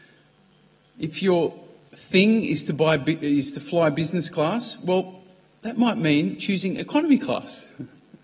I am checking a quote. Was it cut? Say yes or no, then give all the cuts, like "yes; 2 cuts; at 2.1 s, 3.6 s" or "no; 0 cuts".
no; 0 cuts